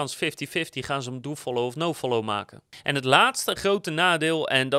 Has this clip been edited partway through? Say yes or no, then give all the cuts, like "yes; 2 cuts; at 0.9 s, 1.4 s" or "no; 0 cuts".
no; 0 cuts